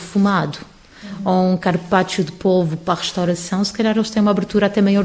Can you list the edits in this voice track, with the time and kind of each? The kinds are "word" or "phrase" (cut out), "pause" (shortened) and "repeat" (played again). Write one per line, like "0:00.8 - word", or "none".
none